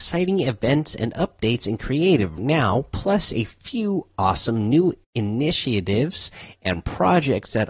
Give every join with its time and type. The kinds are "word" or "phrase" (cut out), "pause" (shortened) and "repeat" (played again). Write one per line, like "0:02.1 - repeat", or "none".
0:02.4 - word
0:05.0 - pause